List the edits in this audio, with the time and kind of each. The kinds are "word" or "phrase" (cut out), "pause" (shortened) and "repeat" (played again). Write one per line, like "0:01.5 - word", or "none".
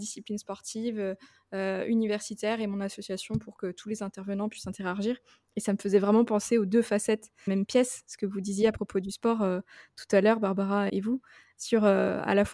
0:07.5 - word
0:10.9 - word

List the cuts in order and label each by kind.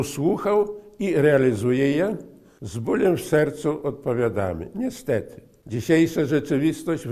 none

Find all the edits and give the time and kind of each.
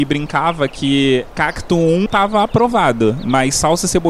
0:02.1 - word

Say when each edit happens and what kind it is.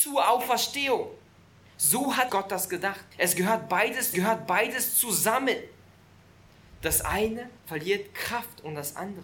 0:01.4 - pause
0:02.3 - word
0:03.1 - pause
0:04.1 - repeat
0:07.6 - pause

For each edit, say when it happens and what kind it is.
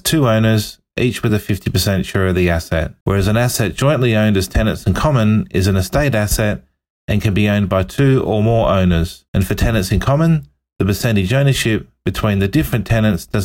none

